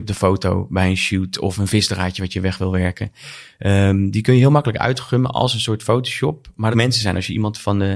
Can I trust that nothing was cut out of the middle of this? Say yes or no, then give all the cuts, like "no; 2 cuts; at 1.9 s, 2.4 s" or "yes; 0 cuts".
no; 1 cut; at 6.7 s